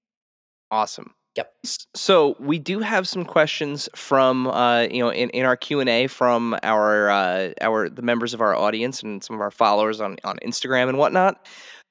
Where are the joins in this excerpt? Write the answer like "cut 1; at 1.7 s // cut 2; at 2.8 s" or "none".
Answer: none